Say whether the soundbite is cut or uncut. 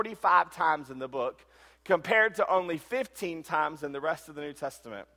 uncut